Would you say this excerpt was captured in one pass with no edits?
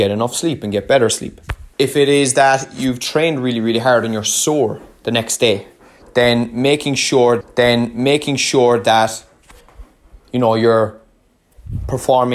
no; 2 cuts; at 1.7 s, 7.4 s

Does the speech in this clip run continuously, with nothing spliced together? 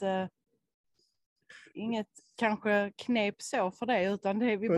no; 1 cut; at 2.4 s

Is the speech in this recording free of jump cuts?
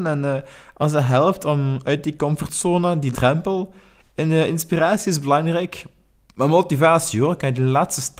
no; 1 cut; at 3.1 s

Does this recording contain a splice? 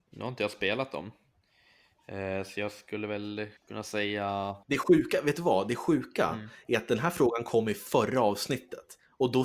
yes; 2 cuts; at 3.6 s, 4.6 s

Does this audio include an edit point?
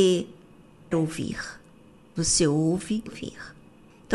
yes; 2 cuts; at 0.9 s, 3.1 s

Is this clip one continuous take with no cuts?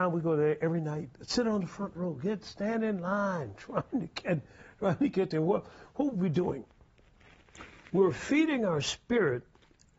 yes; 0 cuts

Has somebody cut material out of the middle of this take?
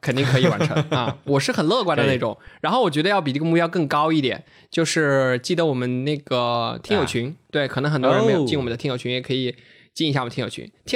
no; 0 cuts

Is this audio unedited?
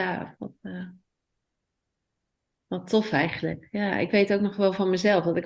yes; 0 cuts

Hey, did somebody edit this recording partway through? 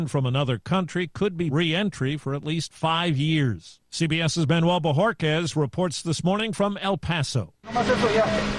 yes; 1 cut; at 1.5 s

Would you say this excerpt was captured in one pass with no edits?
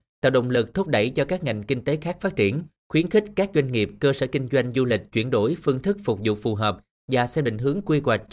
yes; 0 cuts

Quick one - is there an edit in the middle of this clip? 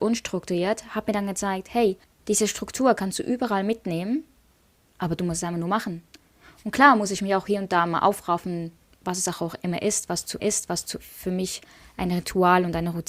yes; 2 cuts; at 2.0 s, 10.4 s

